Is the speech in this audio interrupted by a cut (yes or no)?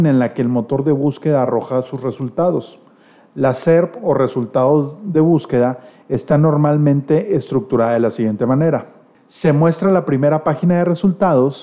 no